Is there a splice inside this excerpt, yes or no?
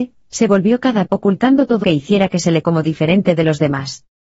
yes